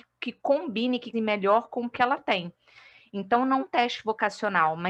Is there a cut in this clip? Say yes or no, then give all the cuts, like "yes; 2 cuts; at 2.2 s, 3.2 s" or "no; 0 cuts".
yes; 3 cuts; at 1.1 s, 1.9 s, 3.6 s